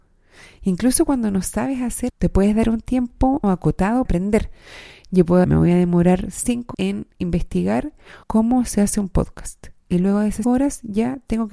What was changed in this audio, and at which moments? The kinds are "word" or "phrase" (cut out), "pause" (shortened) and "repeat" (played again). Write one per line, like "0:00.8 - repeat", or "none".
0:02.1 - word
0:03.4 - word
0:04.1 - word
0:05.4 - phrase
0:06.7 - word
0:08.2 - pause
0:10.4 - word